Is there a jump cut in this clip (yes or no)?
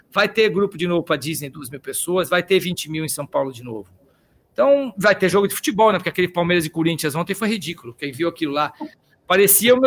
no